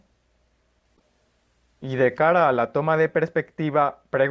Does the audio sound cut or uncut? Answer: uncut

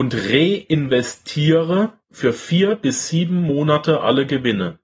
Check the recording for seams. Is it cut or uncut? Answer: cut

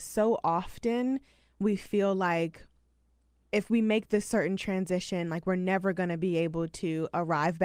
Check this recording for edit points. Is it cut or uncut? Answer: uncut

